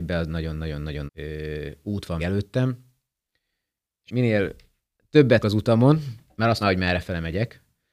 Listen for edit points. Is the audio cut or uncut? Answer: cut